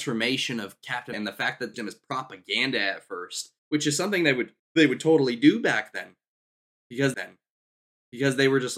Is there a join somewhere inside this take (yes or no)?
yes